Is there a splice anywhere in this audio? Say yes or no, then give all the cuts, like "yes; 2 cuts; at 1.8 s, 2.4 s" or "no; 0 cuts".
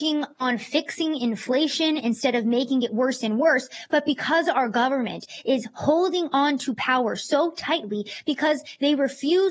no; 0 cuts